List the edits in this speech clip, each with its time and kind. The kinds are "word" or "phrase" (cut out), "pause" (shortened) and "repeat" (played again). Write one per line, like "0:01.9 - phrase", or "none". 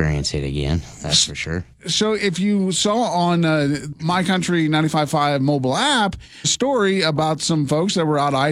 0:06.4 - phrase